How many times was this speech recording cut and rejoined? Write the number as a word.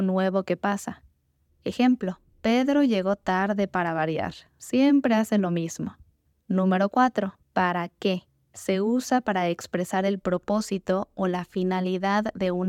four